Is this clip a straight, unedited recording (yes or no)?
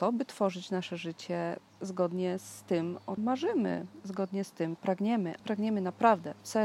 no